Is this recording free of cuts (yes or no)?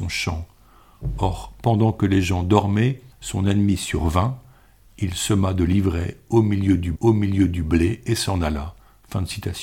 no